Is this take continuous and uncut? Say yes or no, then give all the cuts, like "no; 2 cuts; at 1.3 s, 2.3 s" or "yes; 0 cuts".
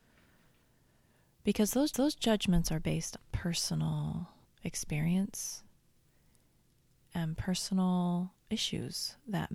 no; 3 cuts; at 1.9 s, 3.2 s, 4.4 s